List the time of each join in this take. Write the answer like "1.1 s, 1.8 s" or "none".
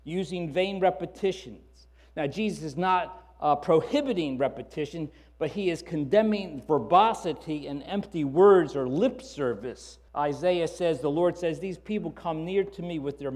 10.1 s